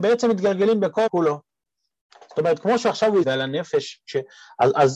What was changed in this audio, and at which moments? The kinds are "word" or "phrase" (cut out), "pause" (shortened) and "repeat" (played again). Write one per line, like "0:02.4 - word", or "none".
0:01.1 - word
0:03.2 - phrase